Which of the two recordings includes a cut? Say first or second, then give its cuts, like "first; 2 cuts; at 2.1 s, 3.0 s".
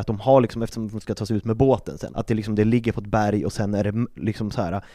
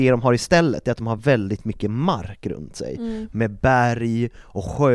first; 1 cut; at 2.1 s